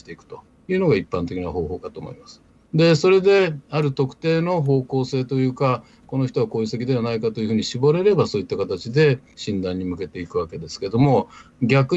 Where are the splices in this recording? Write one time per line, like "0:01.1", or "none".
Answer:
0:02.6